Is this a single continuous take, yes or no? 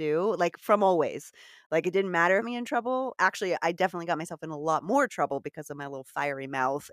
no